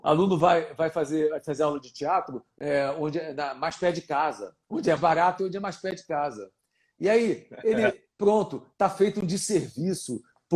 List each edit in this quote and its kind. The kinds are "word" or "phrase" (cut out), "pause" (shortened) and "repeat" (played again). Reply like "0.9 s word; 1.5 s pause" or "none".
4.6 s pause; 5.0 s word